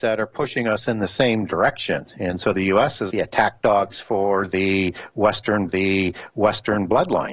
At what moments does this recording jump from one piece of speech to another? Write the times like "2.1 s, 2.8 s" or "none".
3.1 s, 5.7 s